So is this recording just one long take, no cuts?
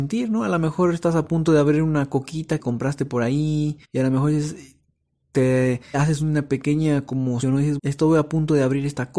no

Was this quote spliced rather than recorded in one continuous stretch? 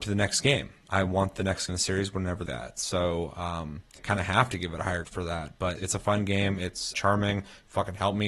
yes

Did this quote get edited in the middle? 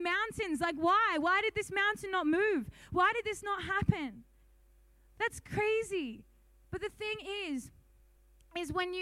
no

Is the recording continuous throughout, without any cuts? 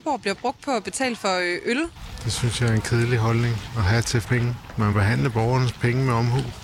no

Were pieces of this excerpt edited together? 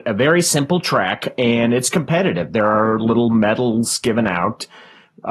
no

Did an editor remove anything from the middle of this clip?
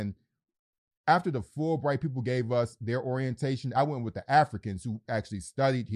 no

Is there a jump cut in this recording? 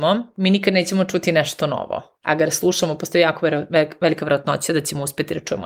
no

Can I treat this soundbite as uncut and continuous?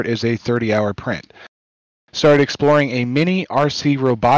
yes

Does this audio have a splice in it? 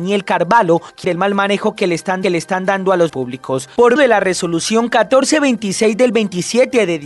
yes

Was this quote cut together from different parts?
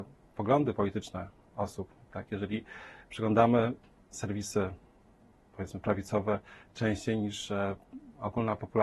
no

